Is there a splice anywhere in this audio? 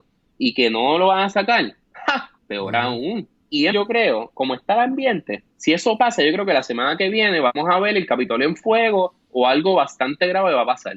yes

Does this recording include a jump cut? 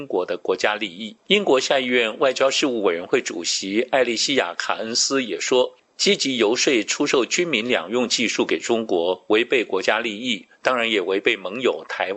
yes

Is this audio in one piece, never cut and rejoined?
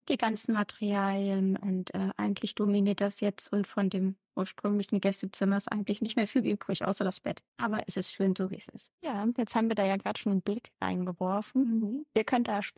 no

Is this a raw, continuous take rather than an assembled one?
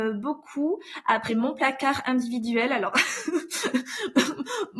no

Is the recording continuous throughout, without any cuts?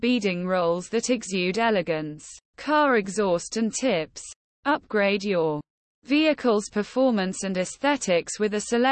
no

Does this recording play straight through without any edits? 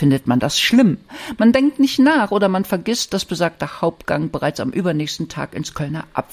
yes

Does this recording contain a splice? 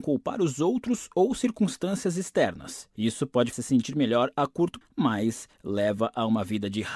yes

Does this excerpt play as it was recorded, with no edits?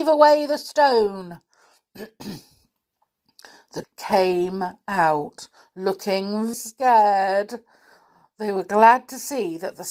no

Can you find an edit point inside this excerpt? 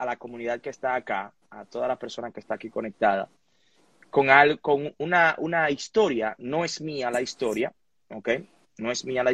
no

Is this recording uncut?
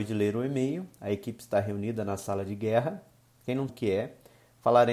no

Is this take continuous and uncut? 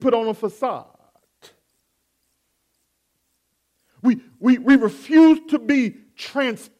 yes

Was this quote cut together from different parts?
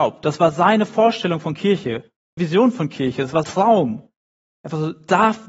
yes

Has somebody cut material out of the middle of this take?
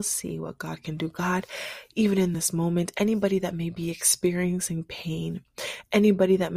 no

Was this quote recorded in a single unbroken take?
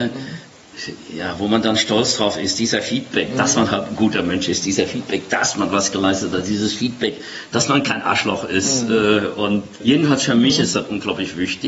no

